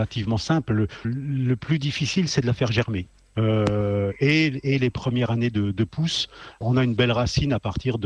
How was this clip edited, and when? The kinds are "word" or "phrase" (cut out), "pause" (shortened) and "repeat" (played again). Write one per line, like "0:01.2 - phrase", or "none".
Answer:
0:01.0 - word
0:06.6 - word